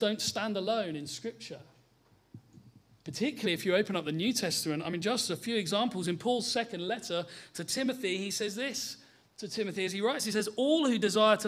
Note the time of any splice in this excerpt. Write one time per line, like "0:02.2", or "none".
none